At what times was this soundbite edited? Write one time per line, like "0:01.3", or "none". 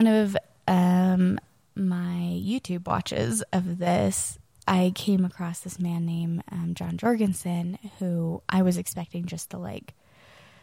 none